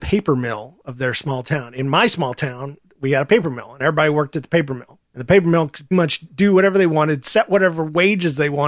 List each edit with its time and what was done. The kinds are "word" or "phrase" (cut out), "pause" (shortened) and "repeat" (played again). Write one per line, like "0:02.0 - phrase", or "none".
0:05.0 - pause
0:05.9 - word